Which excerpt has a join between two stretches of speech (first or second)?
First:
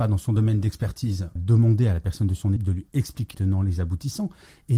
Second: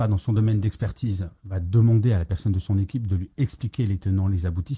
first